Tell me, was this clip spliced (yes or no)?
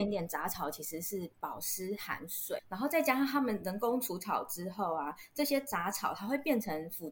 yes